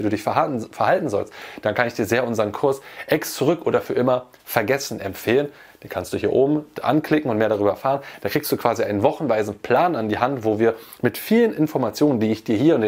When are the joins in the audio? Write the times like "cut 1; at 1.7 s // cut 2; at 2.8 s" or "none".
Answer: none

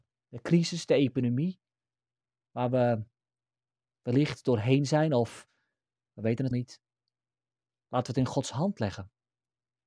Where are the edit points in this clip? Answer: cut 1; at 6.5 s

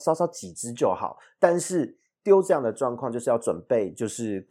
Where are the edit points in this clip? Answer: none

